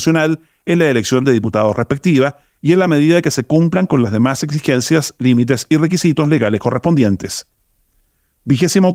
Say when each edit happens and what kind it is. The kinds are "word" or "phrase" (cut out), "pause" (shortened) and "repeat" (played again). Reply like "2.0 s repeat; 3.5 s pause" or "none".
none